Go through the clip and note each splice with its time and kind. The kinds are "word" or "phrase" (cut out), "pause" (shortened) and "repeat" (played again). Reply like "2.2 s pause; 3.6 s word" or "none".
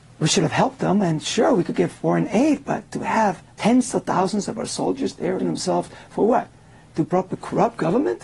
3.5 s pause; 5.4 s word; 7.3 s word